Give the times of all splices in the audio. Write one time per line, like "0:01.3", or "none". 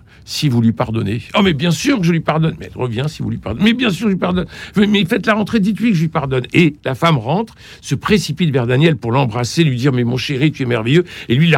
none